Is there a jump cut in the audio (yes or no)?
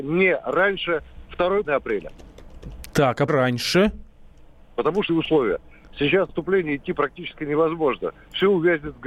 yes